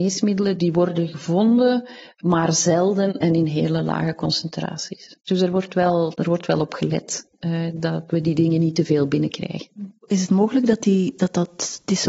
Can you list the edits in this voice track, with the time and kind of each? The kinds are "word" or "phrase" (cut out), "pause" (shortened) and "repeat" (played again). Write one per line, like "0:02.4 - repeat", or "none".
none

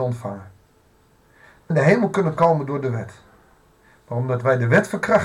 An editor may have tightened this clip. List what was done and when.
0:01.7 - phrase

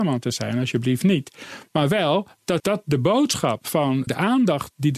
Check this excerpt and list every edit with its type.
0:02.6 - word
0:04.1 - word

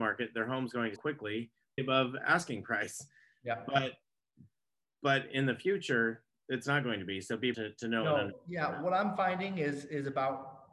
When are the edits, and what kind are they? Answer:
0:01.0 - word
0:01.8 - word
0:07.5 - word

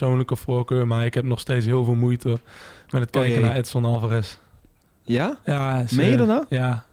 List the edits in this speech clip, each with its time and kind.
none

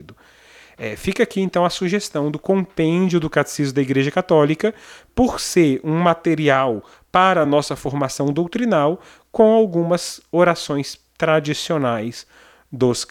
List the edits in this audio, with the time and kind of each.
none

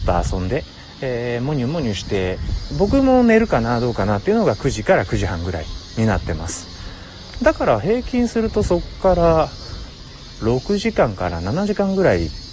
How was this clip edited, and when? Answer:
0:02.7 - word

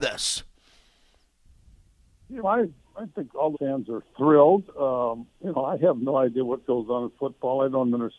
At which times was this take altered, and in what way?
0:02.4 - word
0:03.5 - word
0:05.3 - pause

